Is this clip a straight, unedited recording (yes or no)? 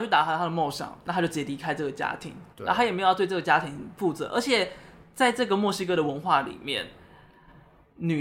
no